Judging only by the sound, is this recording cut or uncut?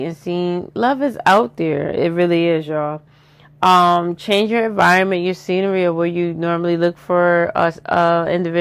uncut